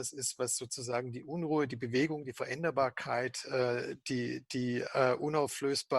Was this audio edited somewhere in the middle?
no; 0 cuts

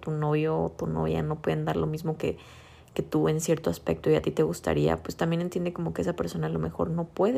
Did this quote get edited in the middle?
no; 0 cuts

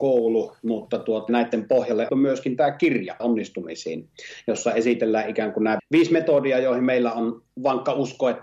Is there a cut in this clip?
yes; 4 cuts; at 1.3 s, 2.1 s, 3.2 s, 5.8 s

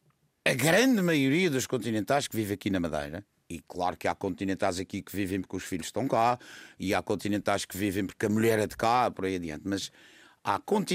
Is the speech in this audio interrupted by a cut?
no; 0 cuts

